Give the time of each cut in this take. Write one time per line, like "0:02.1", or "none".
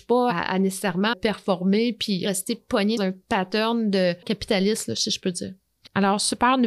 0:01.1
0:03.0
0:04.2